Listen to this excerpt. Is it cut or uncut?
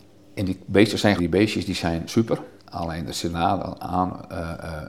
cut